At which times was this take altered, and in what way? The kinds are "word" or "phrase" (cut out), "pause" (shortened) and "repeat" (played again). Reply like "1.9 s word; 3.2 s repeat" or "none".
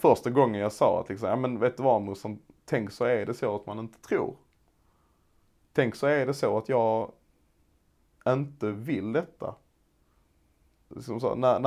none